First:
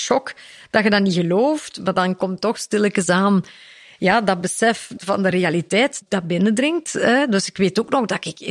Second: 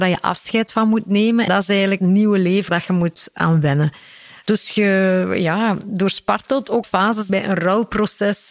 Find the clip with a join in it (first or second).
second